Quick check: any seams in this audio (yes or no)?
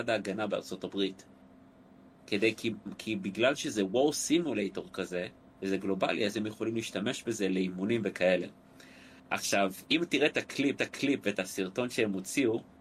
yes